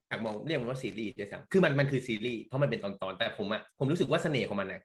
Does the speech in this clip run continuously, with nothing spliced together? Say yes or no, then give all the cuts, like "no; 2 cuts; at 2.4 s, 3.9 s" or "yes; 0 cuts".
no; 1 cut; at 3.7 s